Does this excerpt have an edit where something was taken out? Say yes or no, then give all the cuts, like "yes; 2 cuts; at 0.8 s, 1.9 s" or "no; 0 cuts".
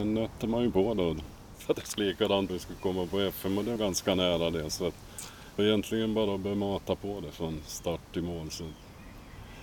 yes; 5 cuts; at 1.7 s, 2.0 s, 2.5 s, 3.8 s, 5.6 s